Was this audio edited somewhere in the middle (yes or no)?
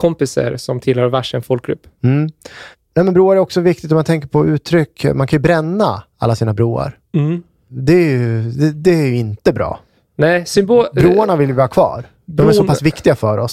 no